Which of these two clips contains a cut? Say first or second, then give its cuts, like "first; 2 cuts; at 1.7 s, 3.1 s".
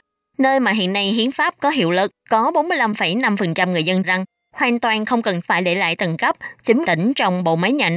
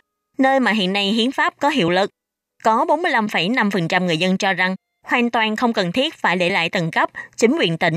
first; 4 cuts; at 2.2 s, 4.0 s, 5.4 s, 6.8 s